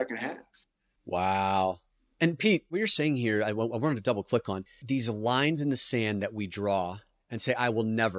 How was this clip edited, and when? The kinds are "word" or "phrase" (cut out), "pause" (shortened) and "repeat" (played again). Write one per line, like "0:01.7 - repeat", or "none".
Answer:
0:04.8 - word